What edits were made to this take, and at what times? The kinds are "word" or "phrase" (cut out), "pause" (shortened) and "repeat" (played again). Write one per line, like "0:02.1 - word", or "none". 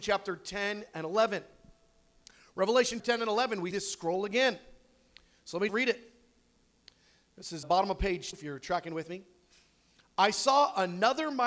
0:03.0 - word
0:03.7 - word
0:05.7 - word
0:07.6 - word
0:08.3 - word